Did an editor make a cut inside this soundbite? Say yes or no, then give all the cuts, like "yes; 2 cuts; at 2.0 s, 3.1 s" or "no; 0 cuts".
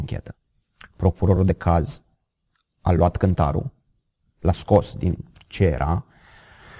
no; 0 cuts